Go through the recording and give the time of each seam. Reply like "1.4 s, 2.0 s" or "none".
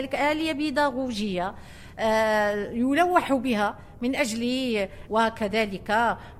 5.1 s